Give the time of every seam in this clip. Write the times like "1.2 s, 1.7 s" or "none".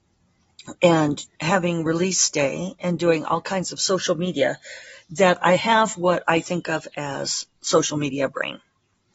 1.3 s